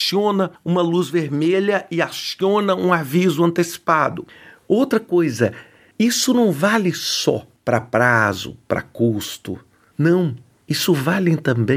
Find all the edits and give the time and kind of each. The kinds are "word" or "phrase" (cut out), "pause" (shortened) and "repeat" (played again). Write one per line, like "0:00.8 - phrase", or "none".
none